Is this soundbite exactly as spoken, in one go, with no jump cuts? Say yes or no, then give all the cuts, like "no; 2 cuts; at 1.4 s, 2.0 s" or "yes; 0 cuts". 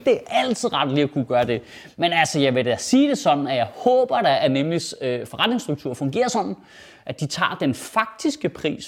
yes; 0 cuts